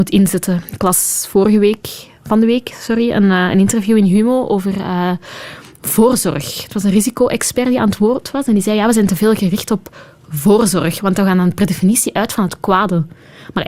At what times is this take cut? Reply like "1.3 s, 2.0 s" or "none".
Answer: none

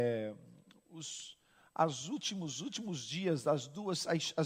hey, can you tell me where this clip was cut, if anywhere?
none

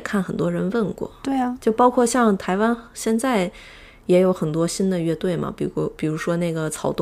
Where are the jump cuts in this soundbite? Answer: none

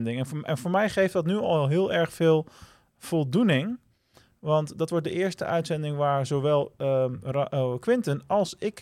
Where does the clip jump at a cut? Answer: none

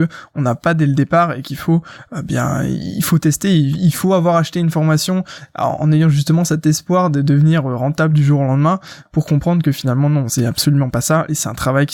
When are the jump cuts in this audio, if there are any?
none

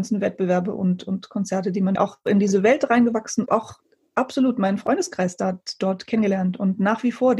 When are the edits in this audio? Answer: 1.9 s, 3.5 s

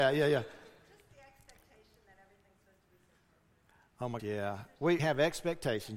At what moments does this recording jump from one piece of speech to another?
4.2 s, 5.0 s

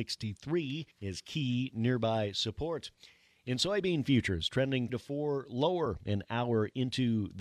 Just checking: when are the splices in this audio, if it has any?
0.9 s, 4.9 s

